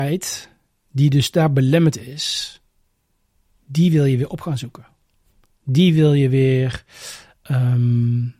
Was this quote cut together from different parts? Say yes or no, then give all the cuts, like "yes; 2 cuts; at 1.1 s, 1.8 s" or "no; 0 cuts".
no; 0 cuts